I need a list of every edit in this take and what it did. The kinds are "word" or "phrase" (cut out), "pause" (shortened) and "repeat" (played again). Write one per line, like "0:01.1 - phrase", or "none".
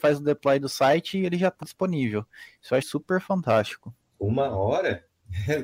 0:01.6 - word
0:02.8 - word